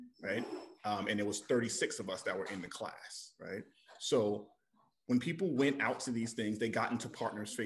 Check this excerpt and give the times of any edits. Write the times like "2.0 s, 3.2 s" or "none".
none